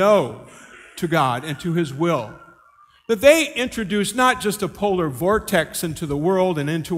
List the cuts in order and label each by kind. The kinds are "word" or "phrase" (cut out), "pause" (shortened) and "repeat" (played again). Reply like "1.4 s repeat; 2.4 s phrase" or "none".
none